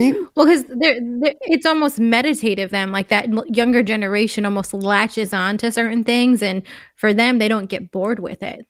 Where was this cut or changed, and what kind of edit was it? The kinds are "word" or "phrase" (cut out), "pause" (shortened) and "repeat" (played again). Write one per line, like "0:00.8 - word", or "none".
0:02.7 - word